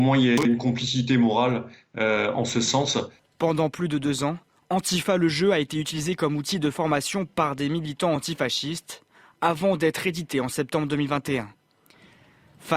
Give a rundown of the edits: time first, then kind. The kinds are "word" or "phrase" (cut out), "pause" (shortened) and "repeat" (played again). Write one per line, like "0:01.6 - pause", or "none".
none